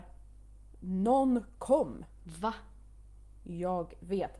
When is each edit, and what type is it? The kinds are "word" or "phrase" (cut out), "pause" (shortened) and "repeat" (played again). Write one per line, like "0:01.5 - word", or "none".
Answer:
none

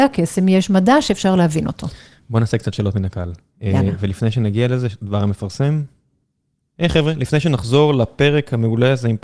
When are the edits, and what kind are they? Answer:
none

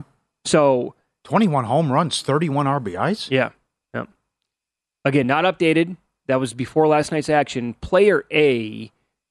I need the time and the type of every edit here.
none

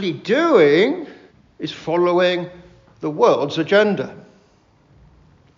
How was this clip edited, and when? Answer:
0:01.3 - pause

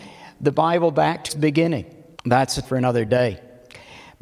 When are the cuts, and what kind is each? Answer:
0:01.3 - word
0:02.1 - pause
0:02.6 - word

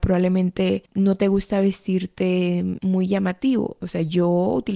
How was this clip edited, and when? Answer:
none

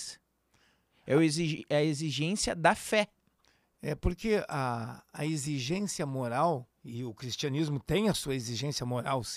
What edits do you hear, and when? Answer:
0:06.8 - pause

